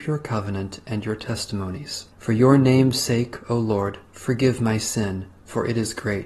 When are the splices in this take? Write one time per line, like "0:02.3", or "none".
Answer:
0:02.1